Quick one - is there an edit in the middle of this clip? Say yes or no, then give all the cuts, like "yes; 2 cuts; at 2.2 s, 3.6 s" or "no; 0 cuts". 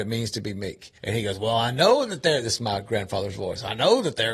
yes; 1 cut; at 1.0 s